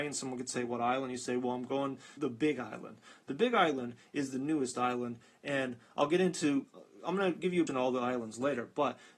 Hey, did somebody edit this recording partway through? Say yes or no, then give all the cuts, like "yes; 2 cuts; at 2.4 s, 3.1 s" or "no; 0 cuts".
yes; 2 cuts; at 2.2 s, 7.7 s